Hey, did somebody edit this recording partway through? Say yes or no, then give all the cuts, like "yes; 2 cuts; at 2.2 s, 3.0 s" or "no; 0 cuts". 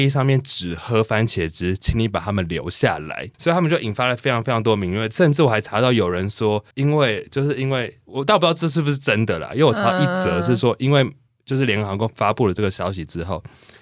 yes; 2 cuts; at 3.3 s, 6.7 s